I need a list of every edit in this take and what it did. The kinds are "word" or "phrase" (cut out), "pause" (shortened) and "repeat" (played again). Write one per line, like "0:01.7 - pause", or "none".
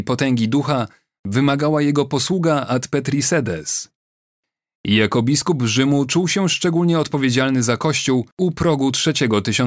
none